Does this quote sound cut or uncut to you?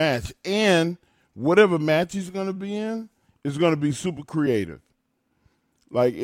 uncut